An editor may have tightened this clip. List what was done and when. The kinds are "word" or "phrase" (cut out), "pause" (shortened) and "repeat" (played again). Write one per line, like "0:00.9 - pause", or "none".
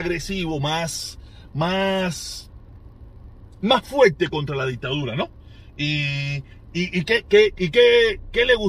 none